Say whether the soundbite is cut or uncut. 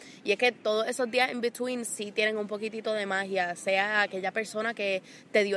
uncut